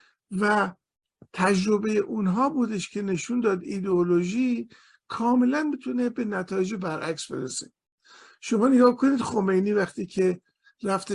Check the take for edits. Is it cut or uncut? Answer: uncut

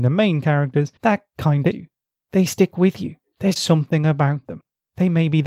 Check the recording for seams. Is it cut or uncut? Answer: cut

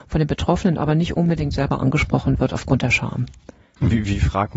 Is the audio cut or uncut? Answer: uncut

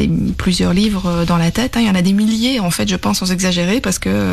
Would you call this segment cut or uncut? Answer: uncut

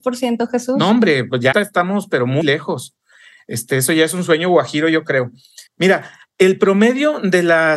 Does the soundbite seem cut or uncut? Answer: cut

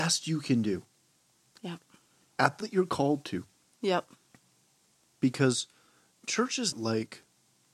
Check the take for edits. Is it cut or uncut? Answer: cut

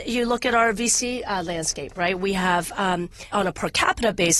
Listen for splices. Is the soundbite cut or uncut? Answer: cut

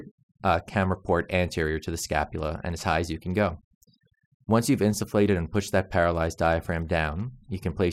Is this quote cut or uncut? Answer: uncut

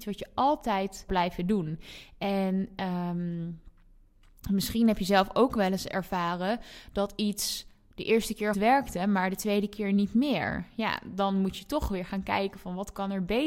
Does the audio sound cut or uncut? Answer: cut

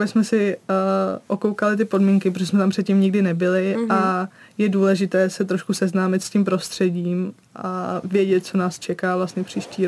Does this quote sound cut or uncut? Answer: uncut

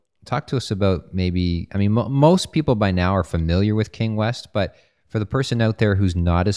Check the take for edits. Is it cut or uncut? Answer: uncut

